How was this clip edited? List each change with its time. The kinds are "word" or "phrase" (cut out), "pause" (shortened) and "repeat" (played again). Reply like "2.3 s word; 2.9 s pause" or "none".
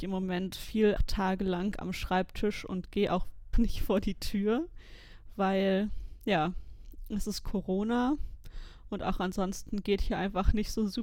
1.0 s word; 3.5 s word